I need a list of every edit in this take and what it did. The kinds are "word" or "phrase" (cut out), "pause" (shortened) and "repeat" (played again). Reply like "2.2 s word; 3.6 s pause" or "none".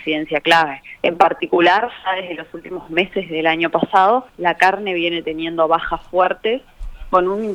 1.0 s pause; 4.3 s pause